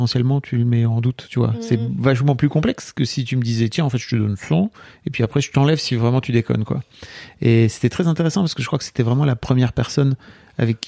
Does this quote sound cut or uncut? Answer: uncut